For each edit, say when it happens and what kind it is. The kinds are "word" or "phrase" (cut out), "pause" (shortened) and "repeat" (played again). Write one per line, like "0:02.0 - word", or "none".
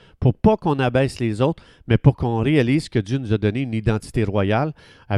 none